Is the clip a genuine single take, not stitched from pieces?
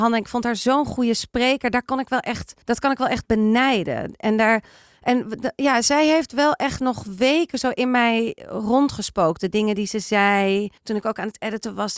no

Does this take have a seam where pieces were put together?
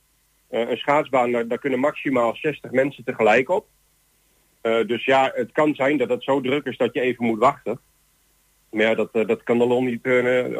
no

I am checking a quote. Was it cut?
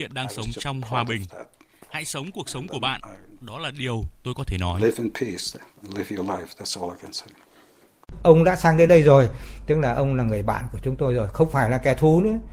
no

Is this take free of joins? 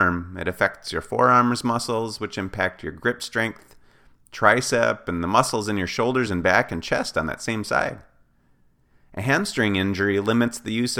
yes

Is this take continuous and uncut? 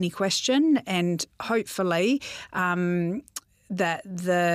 yes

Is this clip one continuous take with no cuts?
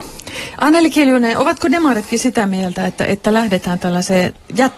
yes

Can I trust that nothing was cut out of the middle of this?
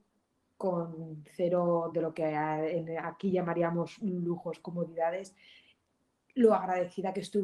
yes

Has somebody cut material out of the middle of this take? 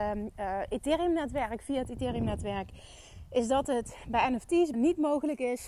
yes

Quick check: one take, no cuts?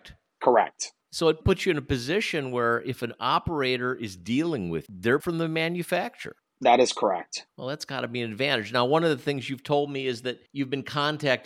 no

